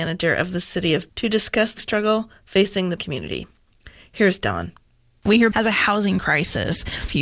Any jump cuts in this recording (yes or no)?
yes